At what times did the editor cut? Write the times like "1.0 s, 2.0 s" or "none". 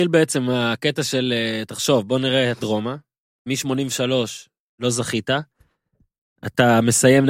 2.6 s